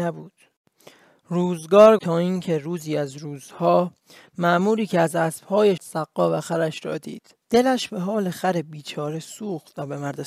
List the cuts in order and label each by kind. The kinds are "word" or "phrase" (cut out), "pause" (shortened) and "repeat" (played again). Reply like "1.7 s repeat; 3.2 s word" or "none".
2.0 s word; 5.8 s phrase; 7.4 s pause